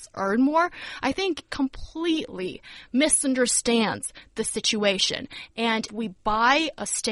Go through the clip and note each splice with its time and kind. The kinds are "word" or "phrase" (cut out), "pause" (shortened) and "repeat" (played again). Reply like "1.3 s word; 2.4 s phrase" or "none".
1.5 s word; 5.9 s word